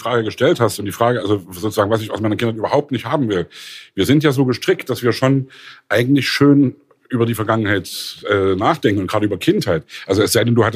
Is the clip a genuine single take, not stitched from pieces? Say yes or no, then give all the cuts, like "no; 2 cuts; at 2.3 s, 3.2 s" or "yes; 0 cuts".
yes; 0 cuts